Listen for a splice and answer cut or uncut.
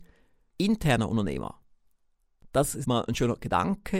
cut